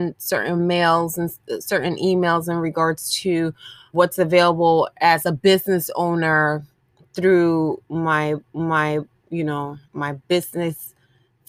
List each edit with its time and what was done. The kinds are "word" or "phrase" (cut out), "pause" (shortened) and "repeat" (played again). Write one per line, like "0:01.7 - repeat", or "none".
0:03.9 - word
0:08.5 - repeat
0:09.8 - pause